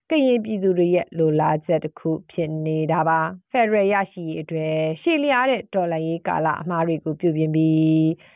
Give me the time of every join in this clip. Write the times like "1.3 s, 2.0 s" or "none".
3.5 s